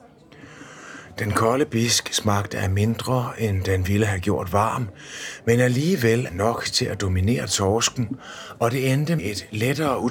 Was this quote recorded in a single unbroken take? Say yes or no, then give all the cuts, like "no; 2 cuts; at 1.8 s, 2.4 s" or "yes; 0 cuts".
no; 2 cuts; at 6.3 s, 9.2 s